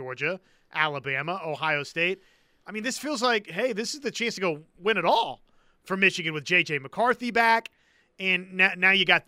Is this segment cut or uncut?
uncut